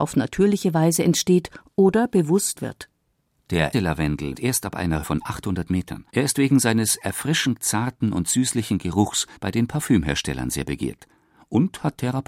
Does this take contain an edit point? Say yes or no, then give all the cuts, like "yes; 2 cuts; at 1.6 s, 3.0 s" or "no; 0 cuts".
yes; 6 cuts; at 2.6 s, 3.7 s, 4.3 s, 5.0 s, 6.1 s, 9.4 s